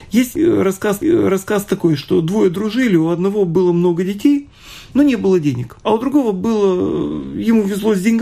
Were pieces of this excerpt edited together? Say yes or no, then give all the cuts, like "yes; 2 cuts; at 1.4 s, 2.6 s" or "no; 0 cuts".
yes; 2 cuts; at 1.0 s, 5.8 s